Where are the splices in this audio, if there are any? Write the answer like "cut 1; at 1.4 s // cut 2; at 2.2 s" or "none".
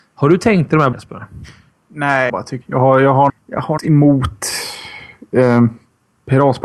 cut 1; at 0.9 s // cut 2; at 2.3 s // cut 3; at 2.6 s // cut 4; at 3.3 s // cut 5; at 3.8 s